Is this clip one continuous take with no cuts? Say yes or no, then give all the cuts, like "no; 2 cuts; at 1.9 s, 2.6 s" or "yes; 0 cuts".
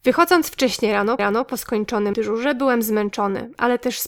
no; 2 cuts; at 1.2 s, 2.1 s